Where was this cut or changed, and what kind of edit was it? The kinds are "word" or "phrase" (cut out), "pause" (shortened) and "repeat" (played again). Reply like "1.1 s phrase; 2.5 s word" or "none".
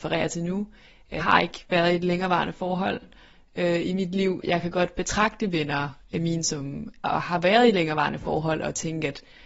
1.2 s word; 4.4 s word; 7.0 s word